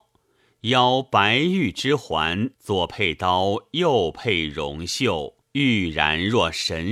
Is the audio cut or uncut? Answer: cut